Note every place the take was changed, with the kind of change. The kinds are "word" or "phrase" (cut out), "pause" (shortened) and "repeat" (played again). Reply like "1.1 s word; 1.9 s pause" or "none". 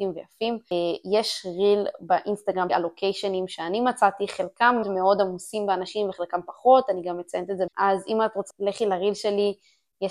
2.7 s word; 4.8 s word; 7.7 s word; 8.5 s word